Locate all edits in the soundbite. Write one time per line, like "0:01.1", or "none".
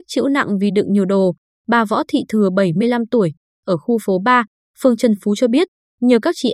none